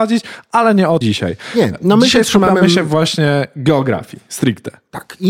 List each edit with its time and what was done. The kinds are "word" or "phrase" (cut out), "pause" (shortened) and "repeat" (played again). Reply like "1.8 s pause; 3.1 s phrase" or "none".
1.0 s word